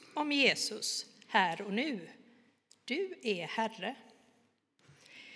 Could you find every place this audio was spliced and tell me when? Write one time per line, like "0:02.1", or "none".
none